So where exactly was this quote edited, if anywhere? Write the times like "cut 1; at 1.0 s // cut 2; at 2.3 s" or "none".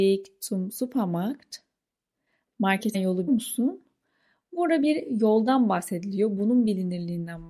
cut 1; at 2.9 s // cut 2; at 3.3 s